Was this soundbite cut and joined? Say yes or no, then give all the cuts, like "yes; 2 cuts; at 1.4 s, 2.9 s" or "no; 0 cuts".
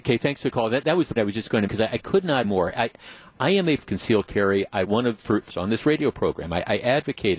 yes; 7 cuts; at 1.2 s, 1.7 s, 2.4 s, 3.8 s, 4.8 s, 5.2 s, 5.5 s